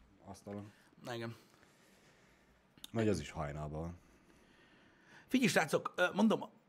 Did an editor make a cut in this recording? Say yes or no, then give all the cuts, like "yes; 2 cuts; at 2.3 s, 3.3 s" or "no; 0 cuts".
no; 0 cuts